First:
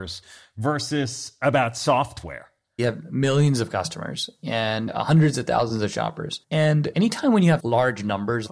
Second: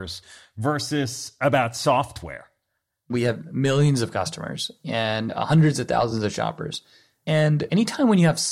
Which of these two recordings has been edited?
first; 3 cuts; at 2.8 s, 6.4 s, 7.6 s

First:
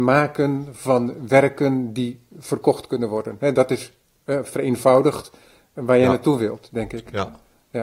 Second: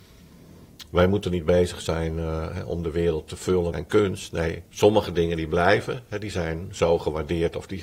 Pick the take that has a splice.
second; 2 cuts; at 3.7 s, 4.7 s

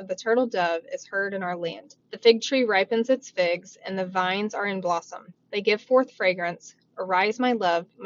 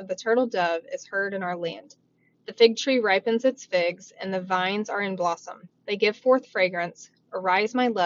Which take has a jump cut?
first; 1 cut; at 2.0 s

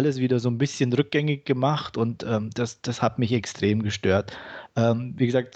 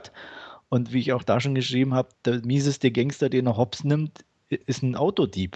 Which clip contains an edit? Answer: second; 2 cuts; at 2.1 s, 4.6 s

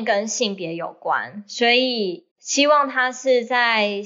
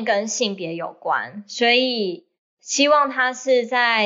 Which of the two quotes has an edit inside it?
first; 1 cut; at 2.3 s

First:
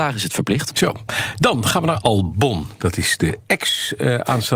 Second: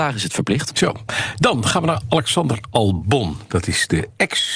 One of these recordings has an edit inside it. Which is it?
first; 1 cut; at 2.0 s

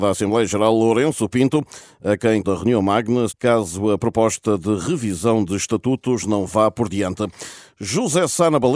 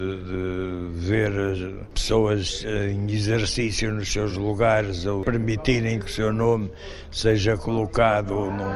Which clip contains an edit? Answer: first; 2 cuts; at 2.4 s, 3.3 s

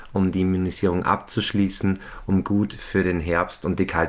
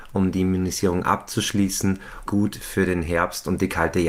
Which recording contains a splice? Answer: second; 1 cut; at 2.3 s

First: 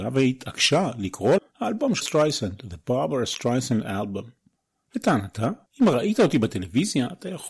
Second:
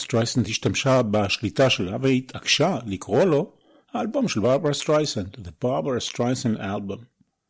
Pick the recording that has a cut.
first; 2 cuts; at 1.4 s, 2.0 s

